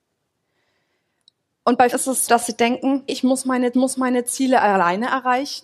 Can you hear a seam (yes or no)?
yes